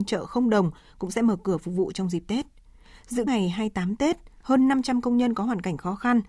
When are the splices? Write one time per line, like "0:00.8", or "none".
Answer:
0:03.3